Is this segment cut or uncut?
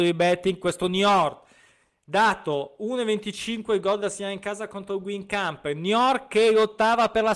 uncut